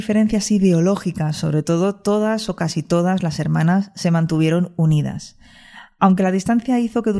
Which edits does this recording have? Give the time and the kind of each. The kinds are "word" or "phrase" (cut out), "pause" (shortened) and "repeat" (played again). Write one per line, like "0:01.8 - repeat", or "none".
none